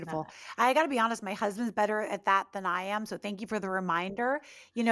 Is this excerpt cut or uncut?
uncut